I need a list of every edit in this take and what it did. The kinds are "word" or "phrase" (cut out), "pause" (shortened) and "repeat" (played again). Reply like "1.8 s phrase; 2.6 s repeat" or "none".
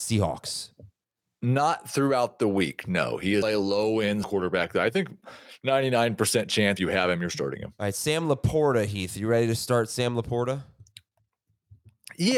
3.4 s word; 4.2 s word; 6.8 s word